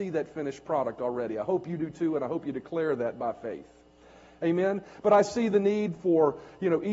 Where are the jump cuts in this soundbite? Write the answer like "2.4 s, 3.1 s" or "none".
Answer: none